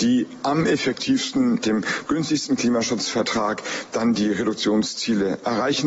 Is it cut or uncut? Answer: uncut